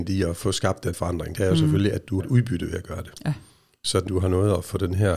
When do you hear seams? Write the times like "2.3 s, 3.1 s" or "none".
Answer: 0.9 s, 2.2 s, 4.1 s